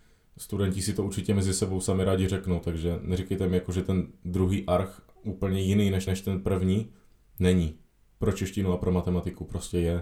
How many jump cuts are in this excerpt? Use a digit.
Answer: 1